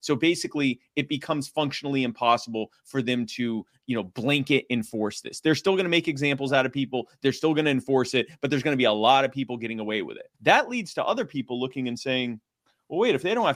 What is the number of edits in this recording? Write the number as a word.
two